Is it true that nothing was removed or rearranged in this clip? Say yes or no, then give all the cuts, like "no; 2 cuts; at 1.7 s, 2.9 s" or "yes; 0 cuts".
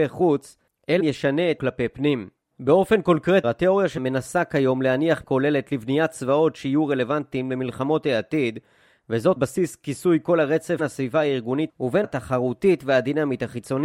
no; 9 cuts; at 1.0 s, 1.6 s, 3.4 s, 4.0 s, 5.2 s, 9.4 s, 10.8 s, 11.7 s, 12.0 s